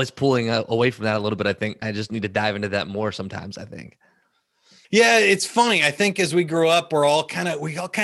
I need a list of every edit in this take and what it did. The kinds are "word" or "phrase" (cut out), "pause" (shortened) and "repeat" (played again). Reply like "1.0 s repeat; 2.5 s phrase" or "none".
1.8 s word